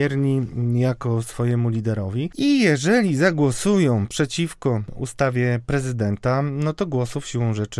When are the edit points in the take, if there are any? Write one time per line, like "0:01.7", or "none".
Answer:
none